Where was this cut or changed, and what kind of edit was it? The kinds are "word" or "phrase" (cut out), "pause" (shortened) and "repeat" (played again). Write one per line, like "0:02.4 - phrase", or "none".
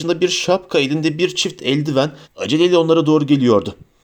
0:02.2 - pause